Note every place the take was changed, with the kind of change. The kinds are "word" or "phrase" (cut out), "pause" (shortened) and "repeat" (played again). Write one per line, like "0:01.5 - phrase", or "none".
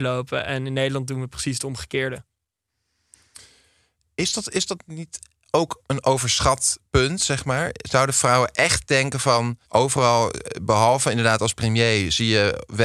0:09.6 - pause